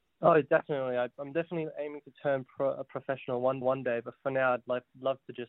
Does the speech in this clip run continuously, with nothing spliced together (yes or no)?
no